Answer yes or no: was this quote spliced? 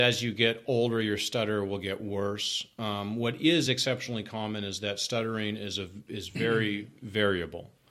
no